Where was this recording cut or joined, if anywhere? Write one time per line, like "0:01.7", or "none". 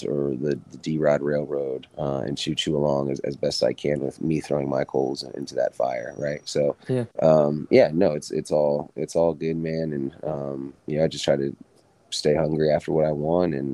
0:01.9
0:07.1
0:10.8
0:11.9